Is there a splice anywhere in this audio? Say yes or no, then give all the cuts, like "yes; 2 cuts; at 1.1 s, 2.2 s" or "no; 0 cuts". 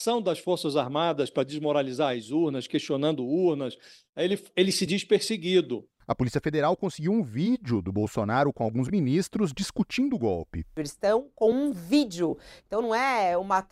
no; 0 cuts